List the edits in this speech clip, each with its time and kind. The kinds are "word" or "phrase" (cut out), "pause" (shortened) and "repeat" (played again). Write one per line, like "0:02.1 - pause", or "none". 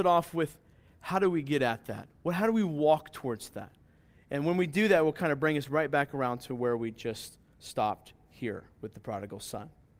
none